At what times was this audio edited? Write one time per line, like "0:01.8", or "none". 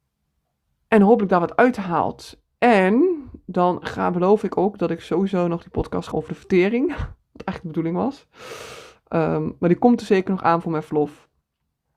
0:06.1